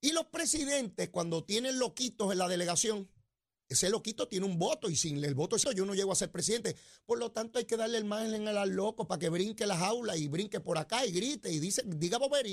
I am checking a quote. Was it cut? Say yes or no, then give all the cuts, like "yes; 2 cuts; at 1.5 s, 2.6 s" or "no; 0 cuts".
yes; 1 cut; at 5.6 s